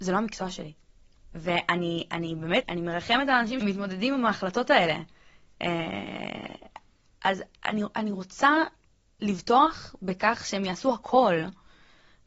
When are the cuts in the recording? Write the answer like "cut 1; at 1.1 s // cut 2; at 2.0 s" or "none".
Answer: cut 1; at 2.6 s // cut 2; at 3.6 s